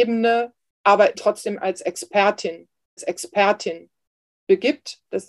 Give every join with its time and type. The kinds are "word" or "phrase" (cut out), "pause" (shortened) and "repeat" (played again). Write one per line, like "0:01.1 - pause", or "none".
0:01.1 - word
0:03.0 - repeat

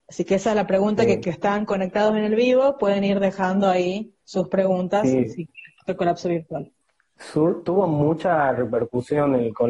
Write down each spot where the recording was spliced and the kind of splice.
0:01.2 - phrase
0:04.2 - pause
0:06.8 - pause

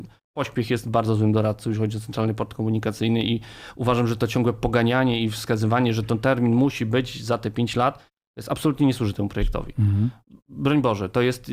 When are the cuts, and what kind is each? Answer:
none

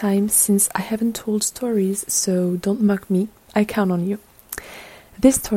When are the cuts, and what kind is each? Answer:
none

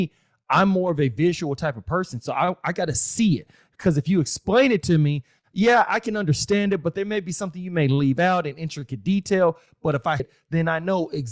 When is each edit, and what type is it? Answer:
0:10.2 - word

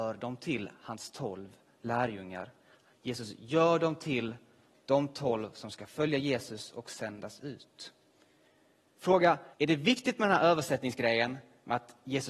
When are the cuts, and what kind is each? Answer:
0:09.5 - pause

